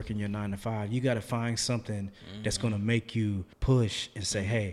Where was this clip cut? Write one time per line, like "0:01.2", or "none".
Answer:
0:03.5